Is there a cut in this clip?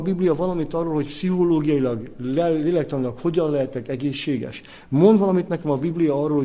no; 0 cuts

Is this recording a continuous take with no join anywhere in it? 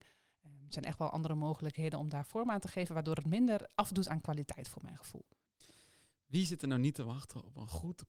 yes; 0 cuts

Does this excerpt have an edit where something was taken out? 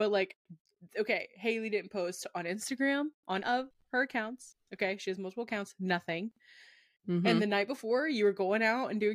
yes; 1 cut; at 3.4 s

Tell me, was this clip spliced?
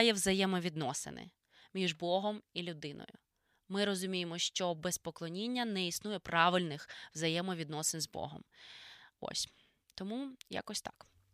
no; 0 cuts

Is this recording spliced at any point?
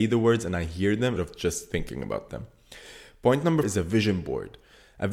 yes; 2 cuts; at 1.2 s, 3.6 s

